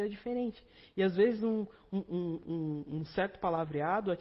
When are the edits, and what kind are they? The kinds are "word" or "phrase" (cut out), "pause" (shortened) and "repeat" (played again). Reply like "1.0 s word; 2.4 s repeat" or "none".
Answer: none